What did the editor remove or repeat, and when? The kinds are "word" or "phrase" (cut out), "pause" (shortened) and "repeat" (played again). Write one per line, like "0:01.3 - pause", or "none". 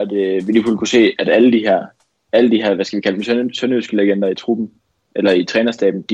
none